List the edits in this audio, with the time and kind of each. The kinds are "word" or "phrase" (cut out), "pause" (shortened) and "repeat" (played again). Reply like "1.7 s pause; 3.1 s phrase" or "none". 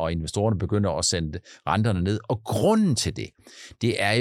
none